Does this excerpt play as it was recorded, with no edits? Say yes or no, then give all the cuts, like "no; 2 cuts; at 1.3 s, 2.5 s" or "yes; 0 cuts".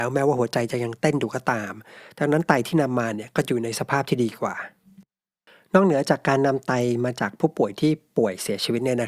yes; 0 cuts